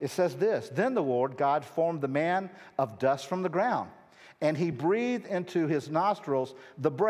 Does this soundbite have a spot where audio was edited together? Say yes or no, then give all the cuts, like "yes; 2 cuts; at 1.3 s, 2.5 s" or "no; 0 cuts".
no; 0 cuts